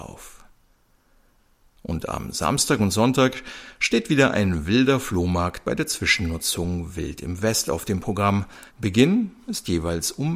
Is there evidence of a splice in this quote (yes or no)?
yes